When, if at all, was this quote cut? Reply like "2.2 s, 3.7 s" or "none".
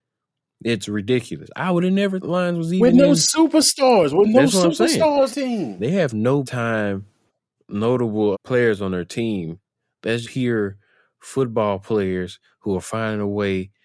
2.2 s, 5.3 s, 6.4 s, 8.3 s, 10.2 s